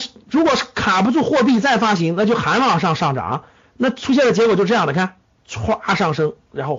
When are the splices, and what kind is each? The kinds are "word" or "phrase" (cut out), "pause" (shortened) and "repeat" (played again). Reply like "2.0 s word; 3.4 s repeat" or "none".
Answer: none